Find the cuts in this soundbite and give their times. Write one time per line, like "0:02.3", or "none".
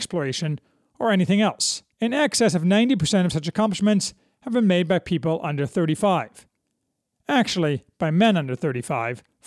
0:01.9